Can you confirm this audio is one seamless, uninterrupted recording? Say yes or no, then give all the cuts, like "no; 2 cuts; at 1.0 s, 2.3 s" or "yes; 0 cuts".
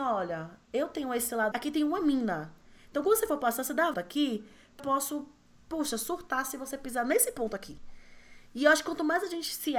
no; 3 cuts; at 1.5 s, 3.9 s, 4.8 s